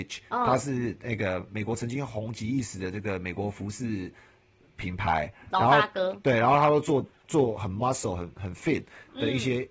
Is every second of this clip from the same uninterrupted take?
yes; 0 cuts

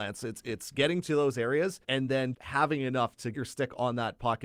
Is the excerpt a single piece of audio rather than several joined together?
no; 3 cuts; at 1.8 s, 2.3 s, 3.3 s

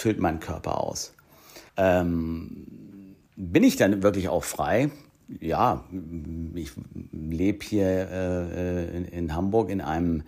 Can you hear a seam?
yes; 1 cut; at 1.7 s

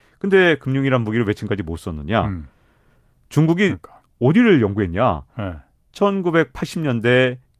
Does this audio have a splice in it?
no; 0 cuts

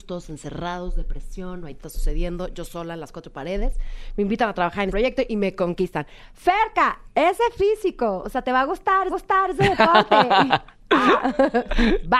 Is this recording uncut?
no; 4 cuts; at 1.8 s, 4.9 s, 9.1 s, 10.5 s

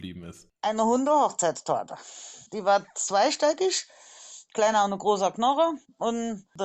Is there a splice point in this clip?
yes; 1 cut; at 2.5 s

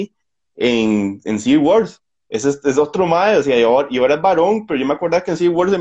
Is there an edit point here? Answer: no; 0 cuts

